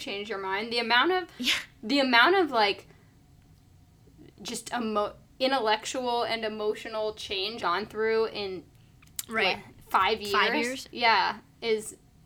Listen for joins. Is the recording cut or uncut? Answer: cut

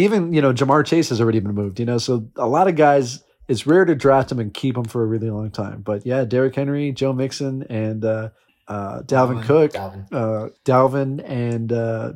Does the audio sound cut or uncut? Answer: cut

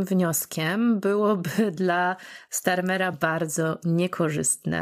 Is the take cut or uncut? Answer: uncut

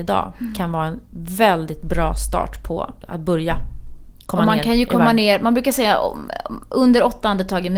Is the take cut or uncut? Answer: cut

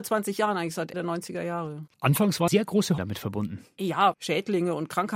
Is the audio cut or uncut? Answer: cut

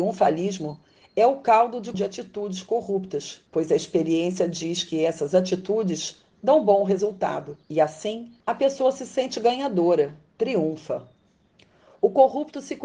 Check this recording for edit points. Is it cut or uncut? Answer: cut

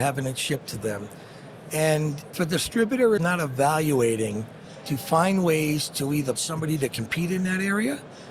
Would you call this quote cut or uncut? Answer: cut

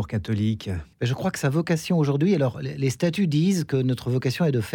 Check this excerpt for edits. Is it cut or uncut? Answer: cut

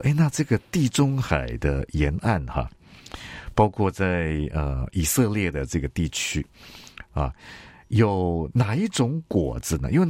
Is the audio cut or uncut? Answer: uncut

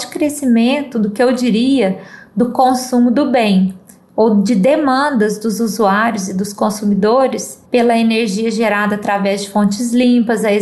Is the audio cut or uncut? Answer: cut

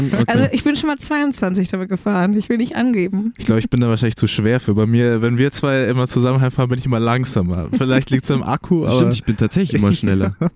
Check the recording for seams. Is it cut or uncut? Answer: uncut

